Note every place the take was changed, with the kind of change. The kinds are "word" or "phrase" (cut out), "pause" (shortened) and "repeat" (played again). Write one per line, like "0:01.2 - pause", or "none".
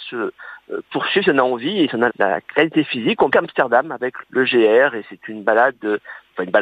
0:02.1 - word
0:03.3 - phrase
0:04.2 - word